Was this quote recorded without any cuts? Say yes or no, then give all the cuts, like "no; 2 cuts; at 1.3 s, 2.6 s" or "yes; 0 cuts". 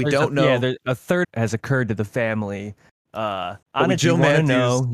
no; 3 cuts; at 1.2 s, 3.6 s, 4.0 s